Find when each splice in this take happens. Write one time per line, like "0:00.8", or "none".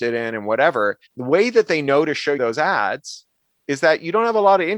0:01.1
0:02.4
0:03.4